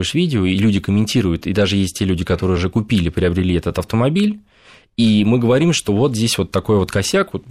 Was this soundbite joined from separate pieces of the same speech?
no; 0 cuts

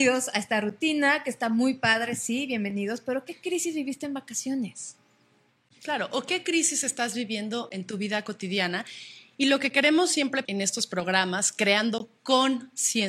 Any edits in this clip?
yes; 1 cut; at 10.4 s

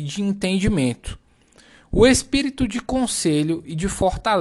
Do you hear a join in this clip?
no; 0 cuts

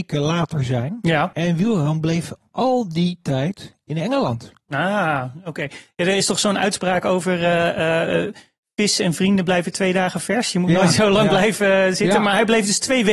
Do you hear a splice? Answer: no; 0 cuts

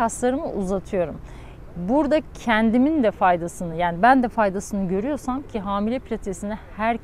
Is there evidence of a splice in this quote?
no; 0 cuts

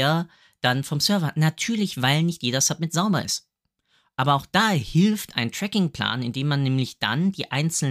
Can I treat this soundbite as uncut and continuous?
yes; 0 cuts

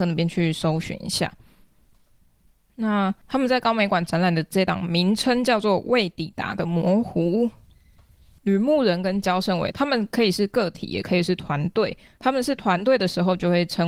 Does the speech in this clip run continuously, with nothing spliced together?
yes; 0 cuts

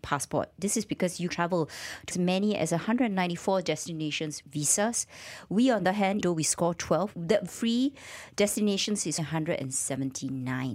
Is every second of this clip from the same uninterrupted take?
no; 8 cuts; at 1.3 s, 2.1 s, 4.4 s, 5.8 s, 6.2 s, 7.1 s, 7.5 s, 9.2 s

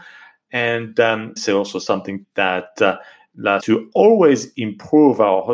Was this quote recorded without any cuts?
no; 3 cuts; at 1.4 s, 2.2 s, 3.6 s

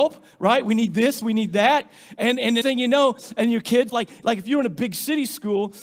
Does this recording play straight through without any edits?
no; 2 cuts; at 2.6 s, 3.9 s

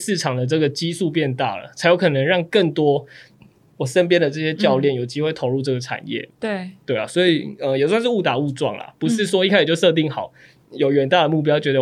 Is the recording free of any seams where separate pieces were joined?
yes; 0 cuts

